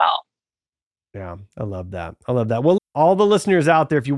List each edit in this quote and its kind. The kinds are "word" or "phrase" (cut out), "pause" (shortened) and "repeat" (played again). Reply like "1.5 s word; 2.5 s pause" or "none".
2.8 s word